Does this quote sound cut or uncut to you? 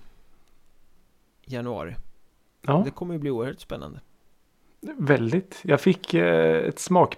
uncut